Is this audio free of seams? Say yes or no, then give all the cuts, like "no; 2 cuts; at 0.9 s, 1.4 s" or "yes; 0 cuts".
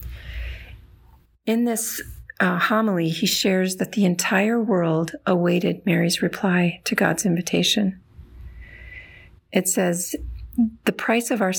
yes; 0 cuts